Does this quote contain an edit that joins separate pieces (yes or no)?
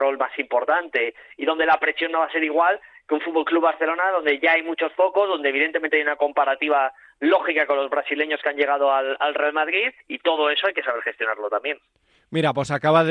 yes